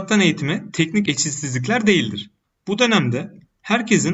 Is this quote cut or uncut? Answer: cut